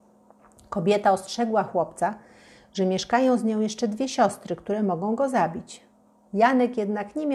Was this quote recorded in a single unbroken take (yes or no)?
yes